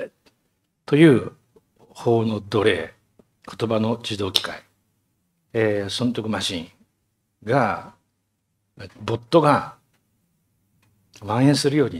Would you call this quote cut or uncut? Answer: cut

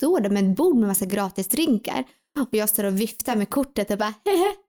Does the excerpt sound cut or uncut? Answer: uncut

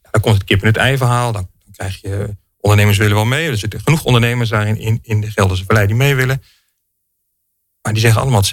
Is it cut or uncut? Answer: uncut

